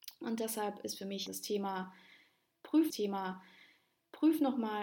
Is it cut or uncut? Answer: cut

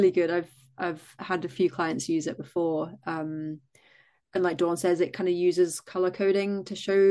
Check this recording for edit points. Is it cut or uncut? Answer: uncut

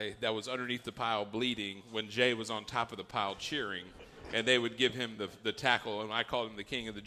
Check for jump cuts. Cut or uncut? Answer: uncut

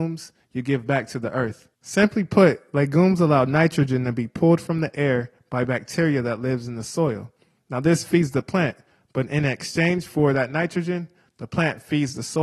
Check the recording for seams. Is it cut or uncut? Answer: cut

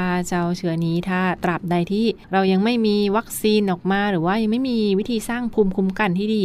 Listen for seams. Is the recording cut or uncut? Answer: cut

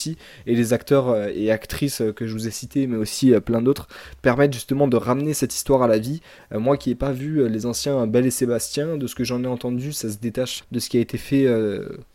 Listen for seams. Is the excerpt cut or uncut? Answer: cut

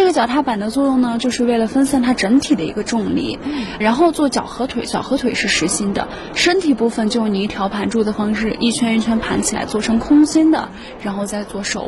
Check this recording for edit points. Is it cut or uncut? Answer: cut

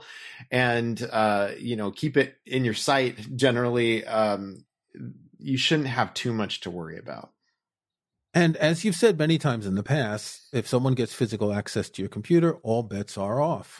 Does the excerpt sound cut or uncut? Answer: uncut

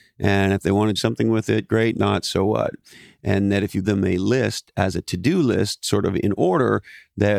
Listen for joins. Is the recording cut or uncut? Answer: cut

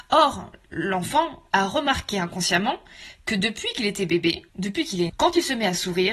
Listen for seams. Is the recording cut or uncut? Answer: cut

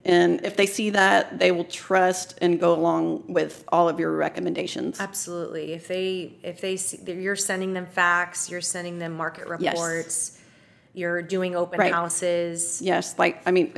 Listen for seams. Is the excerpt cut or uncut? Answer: uncut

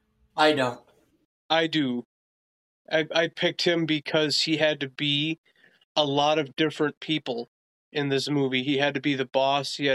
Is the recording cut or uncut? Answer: uncut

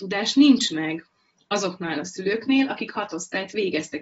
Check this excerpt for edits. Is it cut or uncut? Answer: uncut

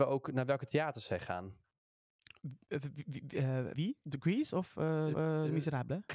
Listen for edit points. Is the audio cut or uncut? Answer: cut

